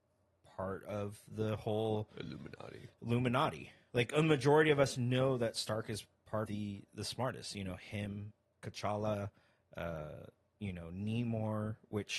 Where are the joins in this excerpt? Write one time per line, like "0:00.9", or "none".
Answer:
0:06.5